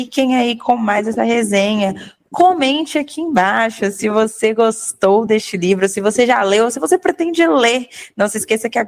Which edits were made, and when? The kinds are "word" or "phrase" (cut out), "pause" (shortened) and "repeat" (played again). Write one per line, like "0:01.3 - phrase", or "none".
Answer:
none